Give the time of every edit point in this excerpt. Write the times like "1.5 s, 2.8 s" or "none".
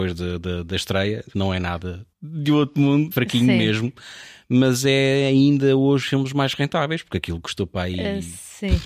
1.3 s, 2.1 s, 3.1 s, 6.0 s